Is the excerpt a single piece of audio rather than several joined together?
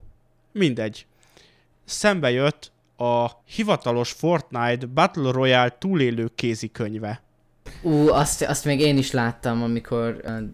no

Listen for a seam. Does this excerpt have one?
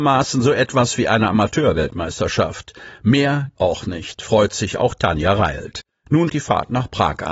yes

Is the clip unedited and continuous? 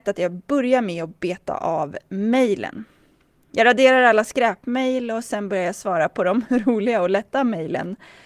yes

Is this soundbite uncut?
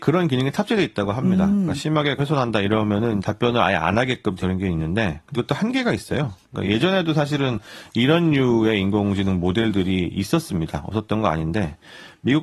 no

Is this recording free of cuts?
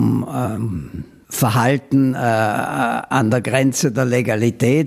yes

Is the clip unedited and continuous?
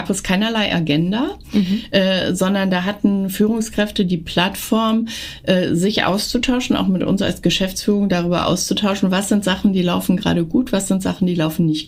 yes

